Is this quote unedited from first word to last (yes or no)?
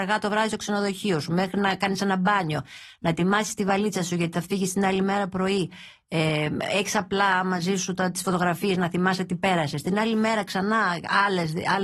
yes